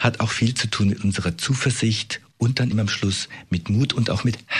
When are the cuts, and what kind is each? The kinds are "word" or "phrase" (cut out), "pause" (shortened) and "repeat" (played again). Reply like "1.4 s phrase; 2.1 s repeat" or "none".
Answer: 2.7 s word